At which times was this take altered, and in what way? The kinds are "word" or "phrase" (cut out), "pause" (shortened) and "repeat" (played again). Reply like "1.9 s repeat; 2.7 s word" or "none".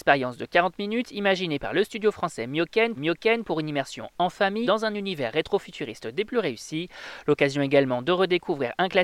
3.0 s repeat; 4.6 s word